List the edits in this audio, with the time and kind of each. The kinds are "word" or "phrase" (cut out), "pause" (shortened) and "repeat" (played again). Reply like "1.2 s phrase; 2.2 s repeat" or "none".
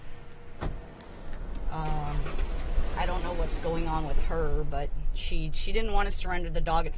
none